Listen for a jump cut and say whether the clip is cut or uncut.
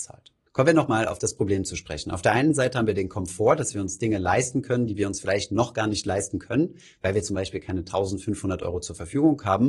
uncut